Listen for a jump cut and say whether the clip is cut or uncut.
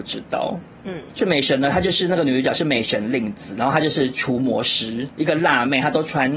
cut